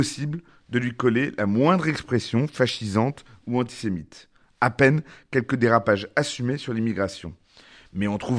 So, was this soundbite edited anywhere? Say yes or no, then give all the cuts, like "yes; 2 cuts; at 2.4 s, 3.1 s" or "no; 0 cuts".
no; 0 cuts